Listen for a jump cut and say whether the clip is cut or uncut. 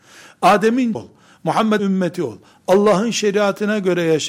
cut